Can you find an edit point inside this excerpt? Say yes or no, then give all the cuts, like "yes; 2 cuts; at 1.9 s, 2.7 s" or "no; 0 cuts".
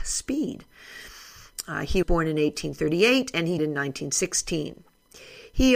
yes; 2 cuts; at 2.0 s, 3.6 s